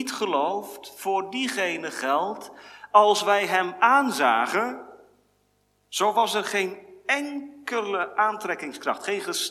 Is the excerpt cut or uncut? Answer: uncut